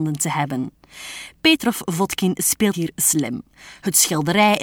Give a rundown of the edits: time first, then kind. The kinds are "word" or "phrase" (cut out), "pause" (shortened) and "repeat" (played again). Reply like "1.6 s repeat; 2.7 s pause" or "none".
2.7 s word